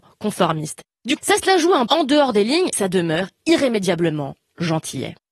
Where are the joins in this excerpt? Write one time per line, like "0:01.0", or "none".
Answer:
0:01.2
0:01.9
0:02.7